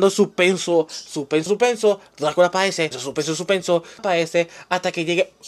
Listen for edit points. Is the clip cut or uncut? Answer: cut